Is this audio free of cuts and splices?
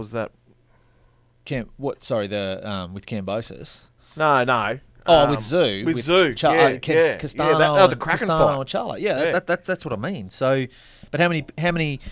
yes; 0 cuts

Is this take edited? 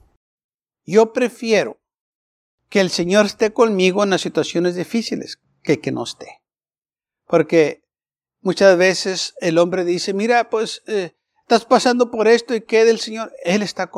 no; 0 cuts

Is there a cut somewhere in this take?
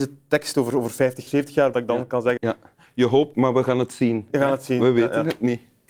yes; 4 cuts; at 1.3 s, 1.7 s, 2.4 s, 3.3 s

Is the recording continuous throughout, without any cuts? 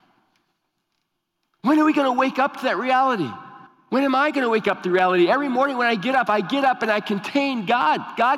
no; 1 cut; at 3.7 s

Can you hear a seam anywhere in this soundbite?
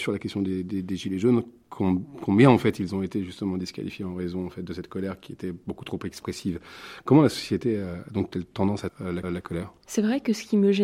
yes; 2 cuts; at 8.9 s, 9.2 s

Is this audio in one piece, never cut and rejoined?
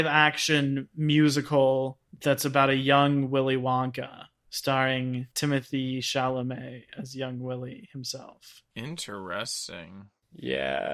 yes; 0 cuts

